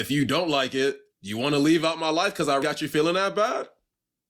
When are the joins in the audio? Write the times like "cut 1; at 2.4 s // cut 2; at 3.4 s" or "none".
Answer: cut 1; at 1.1 s // cut 2; at 2.6 s